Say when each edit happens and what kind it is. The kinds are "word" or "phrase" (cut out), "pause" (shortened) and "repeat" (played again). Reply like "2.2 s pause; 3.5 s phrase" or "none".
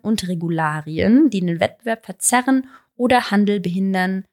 none